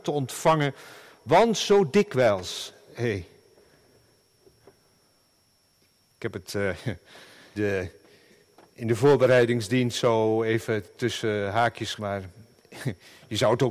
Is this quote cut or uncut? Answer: cut